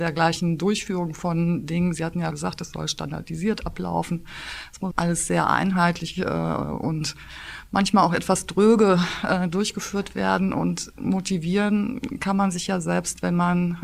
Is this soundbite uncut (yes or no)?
no